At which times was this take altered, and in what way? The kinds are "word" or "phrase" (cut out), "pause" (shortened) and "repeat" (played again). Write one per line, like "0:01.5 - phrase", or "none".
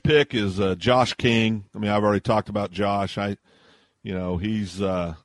none